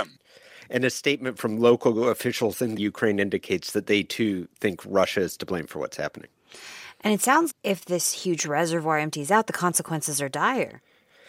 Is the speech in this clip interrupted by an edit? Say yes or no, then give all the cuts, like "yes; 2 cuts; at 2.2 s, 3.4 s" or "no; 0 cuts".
yes; 1 cut; at 7.5 s